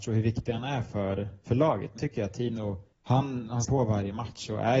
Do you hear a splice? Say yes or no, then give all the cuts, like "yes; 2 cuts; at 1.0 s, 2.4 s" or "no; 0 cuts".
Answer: yes; 3 cuts; at 2.0 s, 2.9 s, 3.6 s